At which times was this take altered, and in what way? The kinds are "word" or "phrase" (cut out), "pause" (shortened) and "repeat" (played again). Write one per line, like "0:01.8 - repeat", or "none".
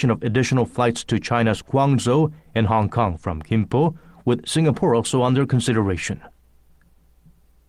none